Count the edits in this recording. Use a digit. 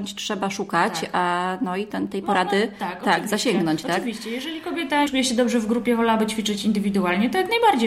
1